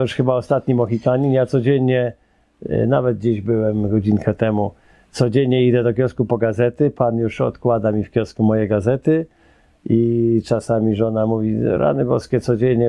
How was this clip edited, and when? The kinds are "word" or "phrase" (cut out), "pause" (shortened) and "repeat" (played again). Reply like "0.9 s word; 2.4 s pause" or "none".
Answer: none